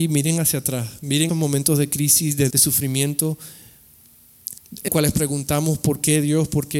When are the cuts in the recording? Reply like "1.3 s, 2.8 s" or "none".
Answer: 1.3 s, 2.5 s, 4.9 s